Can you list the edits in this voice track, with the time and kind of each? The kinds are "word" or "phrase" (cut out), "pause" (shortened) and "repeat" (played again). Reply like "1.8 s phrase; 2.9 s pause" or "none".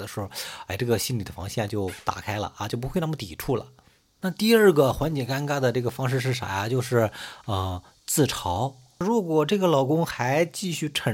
none